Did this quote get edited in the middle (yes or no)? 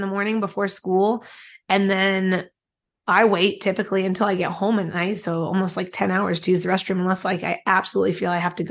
no